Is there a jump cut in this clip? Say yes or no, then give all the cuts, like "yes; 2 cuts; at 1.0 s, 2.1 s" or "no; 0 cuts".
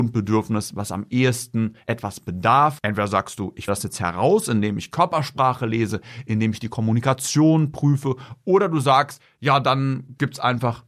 yes; 1 cut; at 3.7 s